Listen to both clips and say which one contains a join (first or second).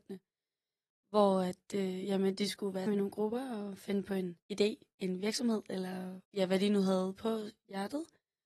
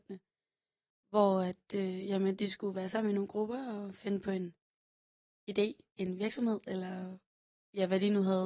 first